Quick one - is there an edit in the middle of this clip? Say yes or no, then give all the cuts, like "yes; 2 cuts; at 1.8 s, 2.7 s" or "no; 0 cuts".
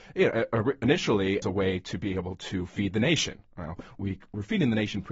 yes; 2 cuts; at 1.4 s, 4.0 s